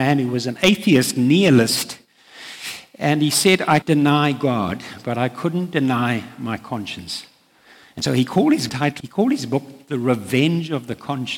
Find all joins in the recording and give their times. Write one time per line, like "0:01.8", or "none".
0:03.8
0:08.7
0:09.0